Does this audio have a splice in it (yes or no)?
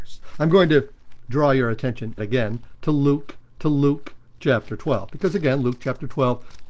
yes